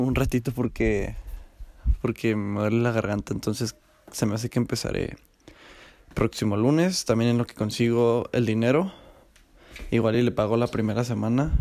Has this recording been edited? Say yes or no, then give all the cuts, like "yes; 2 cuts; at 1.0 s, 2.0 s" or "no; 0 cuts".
no; 0 cuts